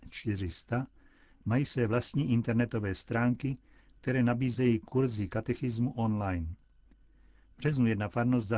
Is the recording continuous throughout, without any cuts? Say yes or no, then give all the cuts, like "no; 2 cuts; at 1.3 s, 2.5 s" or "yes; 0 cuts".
yes; 0 cuts